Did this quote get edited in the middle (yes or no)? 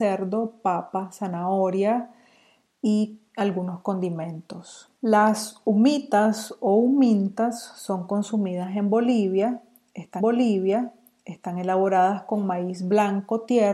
yes